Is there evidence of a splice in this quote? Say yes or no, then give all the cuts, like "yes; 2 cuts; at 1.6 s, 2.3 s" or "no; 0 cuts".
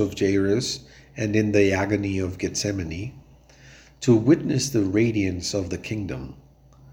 no; 0 cuts